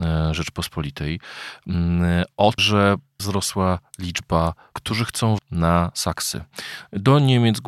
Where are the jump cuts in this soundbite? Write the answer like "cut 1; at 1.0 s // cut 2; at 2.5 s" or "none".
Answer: cut 1; at 2.6 s // cut 2; at 3.2 s // cut 3; at 4.7 s // cut 4; at 5.4 s